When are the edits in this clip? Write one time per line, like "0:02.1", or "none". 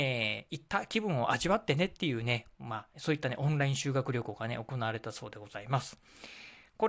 0:02.9